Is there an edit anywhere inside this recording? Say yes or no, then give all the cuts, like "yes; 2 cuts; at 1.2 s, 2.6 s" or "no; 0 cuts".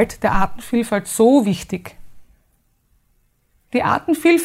no; 0 cuts